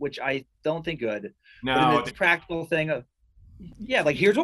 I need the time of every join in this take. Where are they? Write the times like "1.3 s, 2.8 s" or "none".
1.0 s, 2.1 s